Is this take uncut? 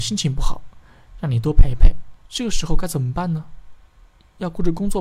no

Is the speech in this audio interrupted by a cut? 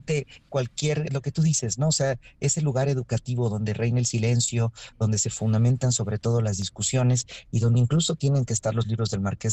yes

